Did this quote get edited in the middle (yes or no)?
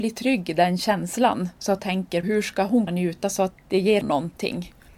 yes